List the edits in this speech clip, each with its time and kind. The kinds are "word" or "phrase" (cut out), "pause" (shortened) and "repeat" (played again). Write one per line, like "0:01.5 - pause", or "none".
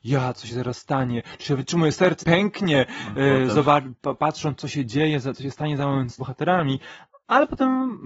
0:01.4 - phrase
0:02.2 - word
0:06.2 - word